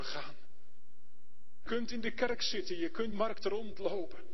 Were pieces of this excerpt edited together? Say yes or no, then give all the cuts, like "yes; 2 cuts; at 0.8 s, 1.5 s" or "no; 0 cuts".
yes; 2 cuts; at 1.7 s, 3.1 s